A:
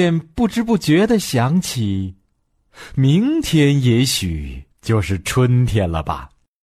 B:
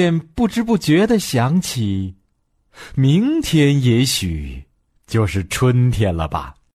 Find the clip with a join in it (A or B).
A